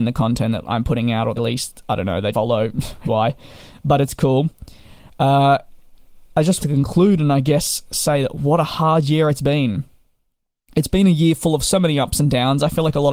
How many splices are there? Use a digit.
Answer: 4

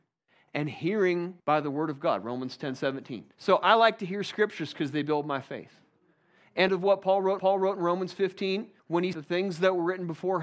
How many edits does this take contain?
6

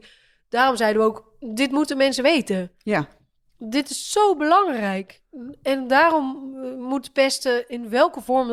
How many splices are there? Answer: 0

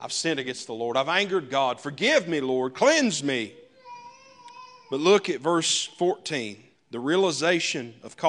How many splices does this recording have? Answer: 1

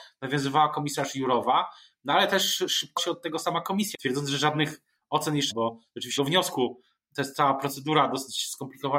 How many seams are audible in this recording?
4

